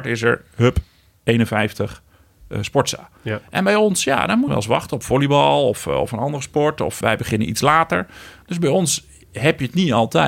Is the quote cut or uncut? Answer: cut